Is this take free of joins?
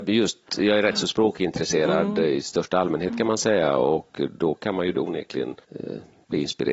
no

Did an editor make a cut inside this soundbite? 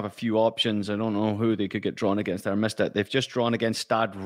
no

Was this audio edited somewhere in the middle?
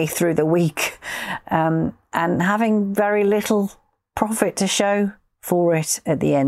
no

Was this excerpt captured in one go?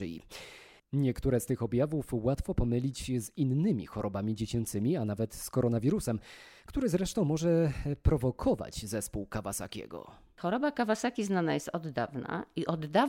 yes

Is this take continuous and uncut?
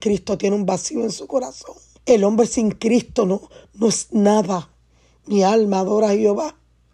no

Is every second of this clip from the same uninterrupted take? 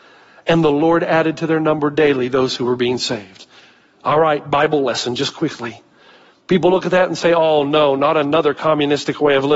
yes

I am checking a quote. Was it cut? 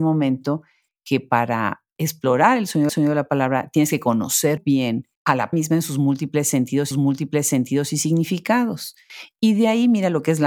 yes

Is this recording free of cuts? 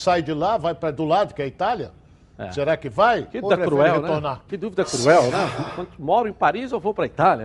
no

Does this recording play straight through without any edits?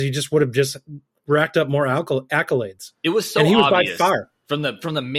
no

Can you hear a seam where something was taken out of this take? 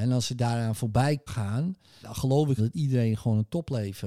yes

